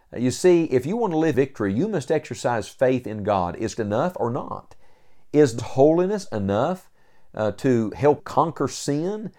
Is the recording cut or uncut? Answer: cut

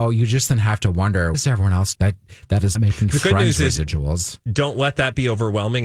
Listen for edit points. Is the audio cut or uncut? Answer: cut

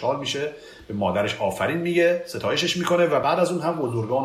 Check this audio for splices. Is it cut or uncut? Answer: uncut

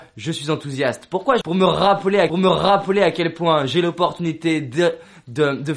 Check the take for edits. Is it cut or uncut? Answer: cut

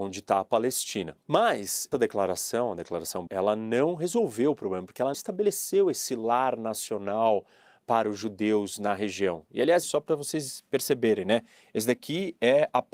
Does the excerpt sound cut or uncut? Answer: cut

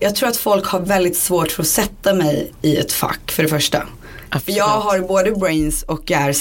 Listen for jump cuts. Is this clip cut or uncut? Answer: uncut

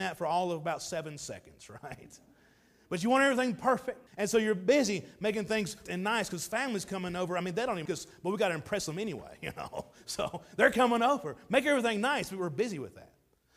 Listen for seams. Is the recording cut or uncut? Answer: cut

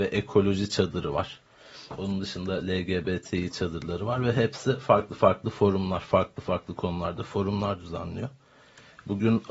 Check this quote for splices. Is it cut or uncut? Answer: uncut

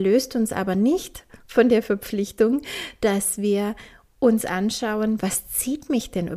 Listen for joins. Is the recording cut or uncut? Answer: uncut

